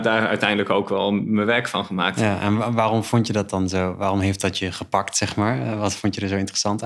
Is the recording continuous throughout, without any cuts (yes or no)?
yes